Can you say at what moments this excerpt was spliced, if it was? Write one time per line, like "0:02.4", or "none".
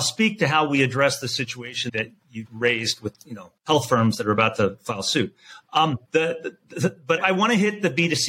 0:01.9
0:02.4
0:03.1
0:03.6
0:06.0
0:07.2

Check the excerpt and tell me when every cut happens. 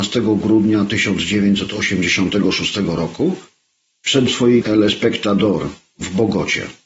0:04.3
0:04.6

